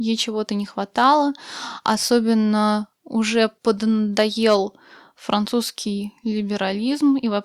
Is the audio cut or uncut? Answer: uncut